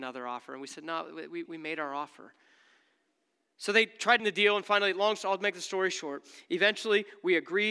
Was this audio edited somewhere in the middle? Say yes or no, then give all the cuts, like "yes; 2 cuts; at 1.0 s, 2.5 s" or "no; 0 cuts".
yes; 2 cuts; at 1.5 s, 4.2 s